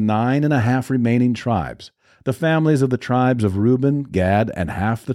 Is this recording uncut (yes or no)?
yes